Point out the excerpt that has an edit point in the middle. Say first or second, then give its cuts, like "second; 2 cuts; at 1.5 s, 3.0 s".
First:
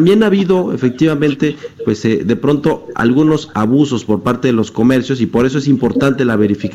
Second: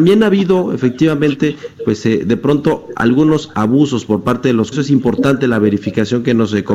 second; 1 cut; at 4.7 s